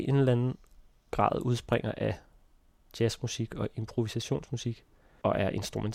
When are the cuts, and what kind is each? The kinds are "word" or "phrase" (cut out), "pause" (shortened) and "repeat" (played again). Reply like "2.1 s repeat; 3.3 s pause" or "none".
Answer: none